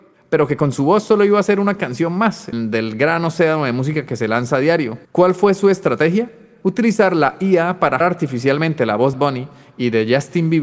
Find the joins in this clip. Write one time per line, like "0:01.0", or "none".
0:02.5
0:05.0
0:08.0
0:09.1

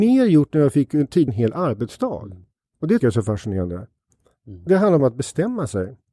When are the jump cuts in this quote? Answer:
0:01.3
0:03.0
0:04.7
0:05.0

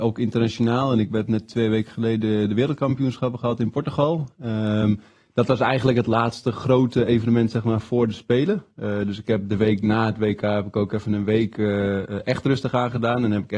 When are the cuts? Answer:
none

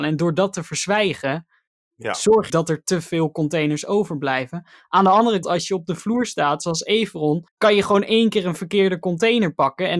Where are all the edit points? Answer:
0:02.5
0:05.4
0:07.5

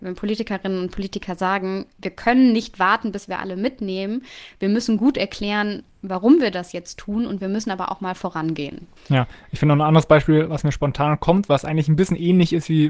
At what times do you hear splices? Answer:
0:09.0

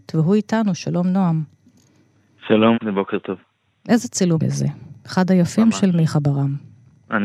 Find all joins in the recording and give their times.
0:02.7
0:04.4

